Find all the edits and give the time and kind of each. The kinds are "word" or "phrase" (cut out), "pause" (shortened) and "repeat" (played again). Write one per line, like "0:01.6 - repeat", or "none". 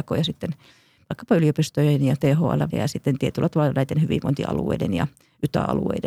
0:02.7 - word